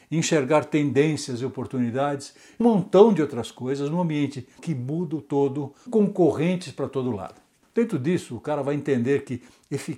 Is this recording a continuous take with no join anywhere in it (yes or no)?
no